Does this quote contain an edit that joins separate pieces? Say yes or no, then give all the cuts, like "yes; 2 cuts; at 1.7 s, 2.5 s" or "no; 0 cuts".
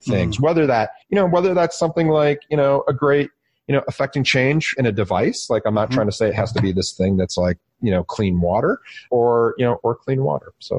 yes; 3 cuts; at 1.0 s, 4.8 s, 9.1 s